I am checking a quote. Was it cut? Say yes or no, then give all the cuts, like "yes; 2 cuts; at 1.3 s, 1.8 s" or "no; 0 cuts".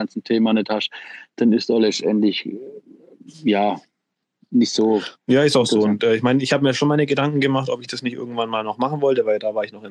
yes; 1 cut; at 5.2 s